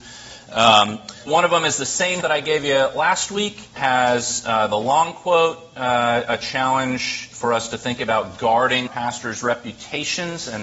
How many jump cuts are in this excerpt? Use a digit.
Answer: 4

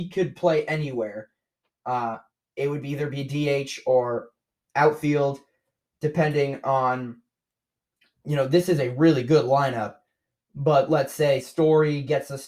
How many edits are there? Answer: 0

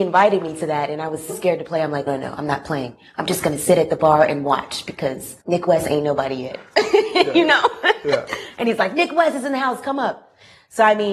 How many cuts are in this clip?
3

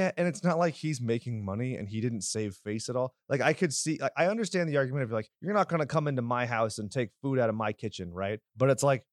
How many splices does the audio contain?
0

